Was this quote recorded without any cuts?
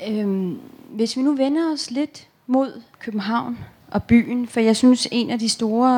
no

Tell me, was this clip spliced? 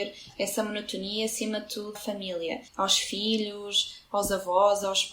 yes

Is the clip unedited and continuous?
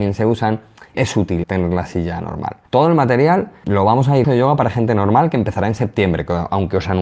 no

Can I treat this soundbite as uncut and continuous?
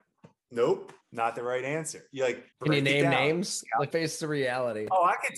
no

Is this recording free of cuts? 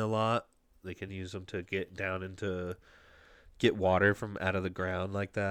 yes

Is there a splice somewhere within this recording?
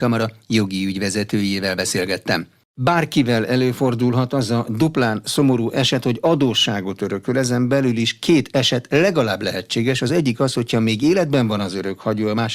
no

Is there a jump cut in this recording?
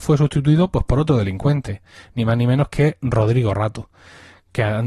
no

